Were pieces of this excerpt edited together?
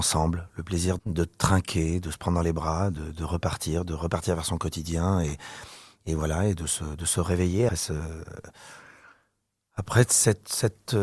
yes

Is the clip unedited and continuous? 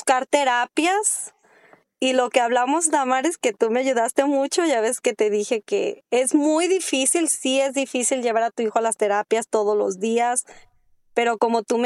yes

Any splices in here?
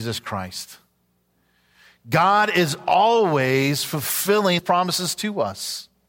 yes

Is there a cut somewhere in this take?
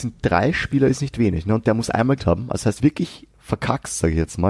yes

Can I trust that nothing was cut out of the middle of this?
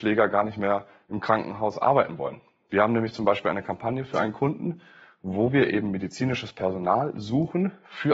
yes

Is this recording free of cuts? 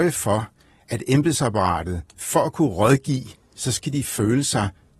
yes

